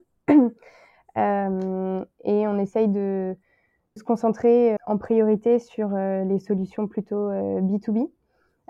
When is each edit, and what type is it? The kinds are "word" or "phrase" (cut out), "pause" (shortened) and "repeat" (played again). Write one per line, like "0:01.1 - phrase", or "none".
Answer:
0:04.0 - word
0:04.8 - word